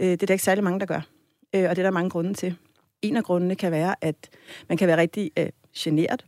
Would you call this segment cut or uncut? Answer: uncut